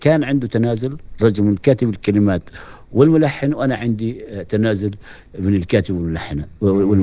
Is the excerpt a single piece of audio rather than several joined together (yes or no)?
yes